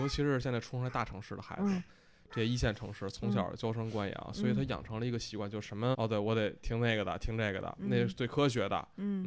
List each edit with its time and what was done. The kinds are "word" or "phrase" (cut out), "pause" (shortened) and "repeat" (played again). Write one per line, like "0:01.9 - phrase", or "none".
0:05.9 - word